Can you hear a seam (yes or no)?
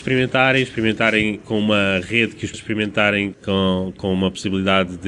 yes